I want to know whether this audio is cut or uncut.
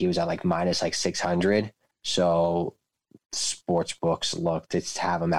cut